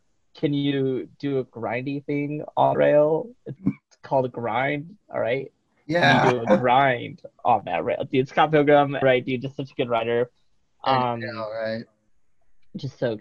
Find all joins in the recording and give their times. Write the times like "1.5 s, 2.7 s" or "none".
2.7 s, 3.6 s, 9.0 s